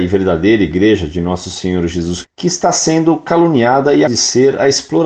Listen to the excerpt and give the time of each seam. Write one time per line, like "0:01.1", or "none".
0:02.2
0:04.1